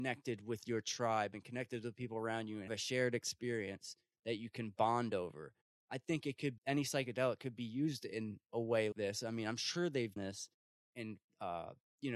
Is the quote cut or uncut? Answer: cut